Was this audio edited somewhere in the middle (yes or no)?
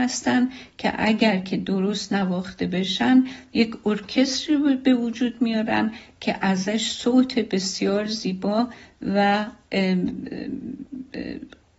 no